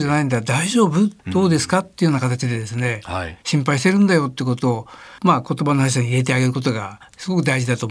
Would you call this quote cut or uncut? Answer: cut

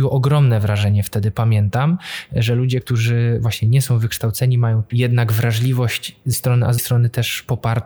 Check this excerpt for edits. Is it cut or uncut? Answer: cut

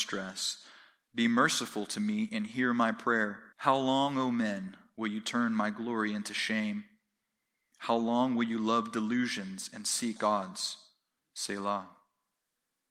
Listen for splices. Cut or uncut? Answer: cut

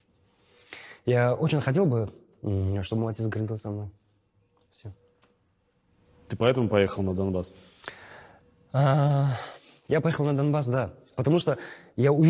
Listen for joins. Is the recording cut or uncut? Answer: uncut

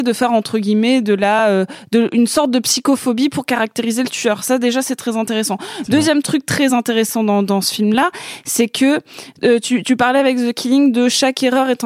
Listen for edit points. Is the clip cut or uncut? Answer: uncut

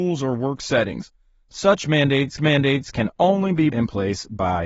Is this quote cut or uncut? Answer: cut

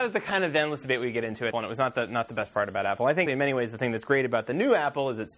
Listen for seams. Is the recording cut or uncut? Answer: cut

